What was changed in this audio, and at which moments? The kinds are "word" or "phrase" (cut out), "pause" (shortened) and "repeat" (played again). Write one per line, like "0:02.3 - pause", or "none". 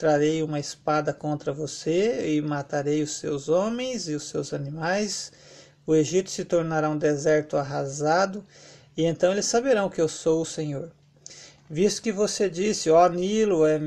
none